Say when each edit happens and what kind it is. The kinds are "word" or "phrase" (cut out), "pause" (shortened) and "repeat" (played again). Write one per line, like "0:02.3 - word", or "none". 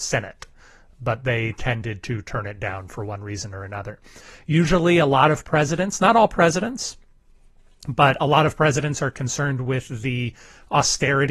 none

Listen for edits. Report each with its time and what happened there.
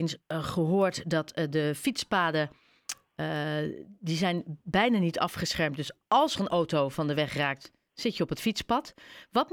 none

